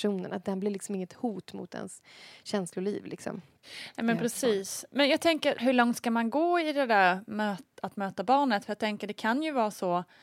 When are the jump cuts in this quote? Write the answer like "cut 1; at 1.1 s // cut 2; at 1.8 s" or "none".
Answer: none

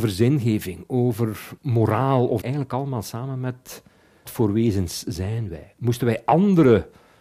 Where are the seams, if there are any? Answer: cut 1; at 1.6 s // cut 2; at 2.4 s // cut 3; at 4.3 s

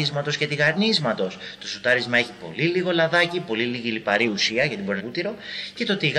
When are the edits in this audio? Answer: cut 1; at 5.0 s

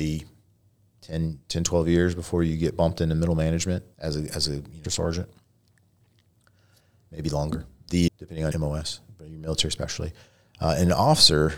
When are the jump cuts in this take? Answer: cut 1; at 3.9 s // cut 2; at 4.8 s // cut 3; at 8.1 s // cut 4; at 8.5 s

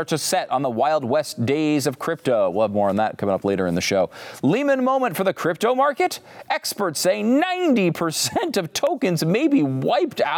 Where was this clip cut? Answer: none

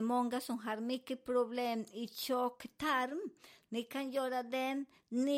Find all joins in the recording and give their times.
none

